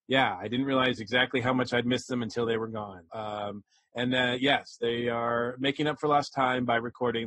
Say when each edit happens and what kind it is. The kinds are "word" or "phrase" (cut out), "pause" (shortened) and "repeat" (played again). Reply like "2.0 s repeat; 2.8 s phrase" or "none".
3.1 s word